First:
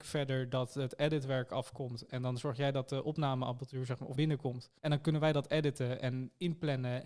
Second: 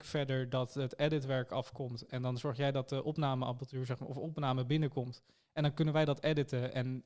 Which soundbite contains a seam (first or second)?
first